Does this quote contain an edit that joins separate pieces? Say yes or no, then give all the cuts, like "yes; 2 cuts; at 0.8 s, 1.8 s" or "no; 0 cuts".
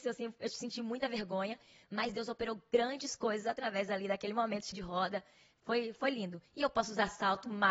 yes; 1 cut; at 4.7 s